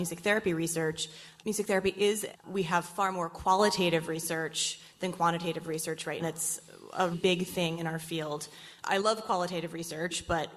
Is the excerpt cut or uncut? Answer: cut